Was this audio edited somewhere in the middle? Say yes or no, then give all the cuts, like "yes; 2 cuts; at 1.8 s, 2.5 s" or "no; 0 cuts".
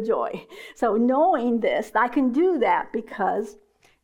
no; 0 cuts